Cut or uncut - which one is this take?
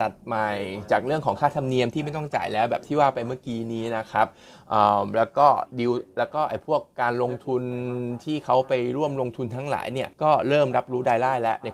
cut